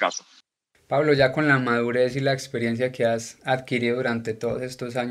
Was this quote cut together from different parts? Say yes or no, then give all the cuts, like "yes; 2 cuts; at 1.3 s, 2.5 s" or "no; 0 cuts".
no; 0 cuts